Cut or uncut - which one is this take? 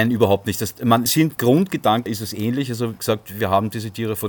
cut